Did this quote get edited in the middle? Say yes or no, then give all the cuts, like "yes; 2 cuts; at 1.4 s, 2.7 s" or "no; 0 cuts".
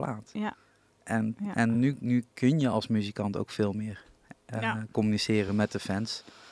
no; 0 cuts